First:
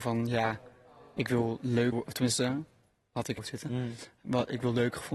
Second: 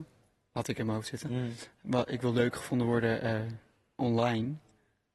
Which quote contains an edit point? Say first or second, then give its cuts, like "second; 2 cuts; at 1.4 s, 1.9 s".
first; 2 cuts; at 1.9 s, 3.4 s